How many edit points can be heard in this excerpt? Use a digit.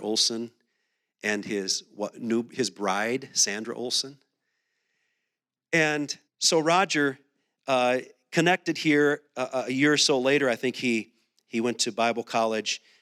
1